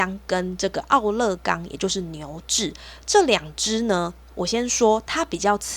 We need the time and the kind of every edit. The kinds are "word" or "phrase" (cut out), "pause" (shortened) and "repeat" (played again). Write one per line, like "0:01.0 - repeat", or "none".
none